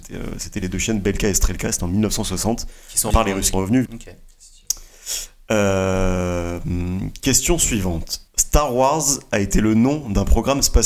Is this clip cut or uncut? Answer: cut